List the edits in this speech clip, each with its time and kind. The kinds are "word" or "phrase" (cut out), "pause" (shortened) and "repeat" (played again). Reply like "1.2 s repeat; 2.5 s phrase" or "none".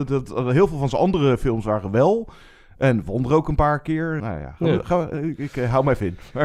4.2 s word